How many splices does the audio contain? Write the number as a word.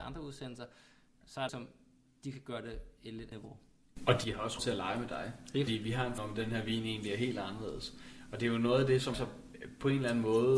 six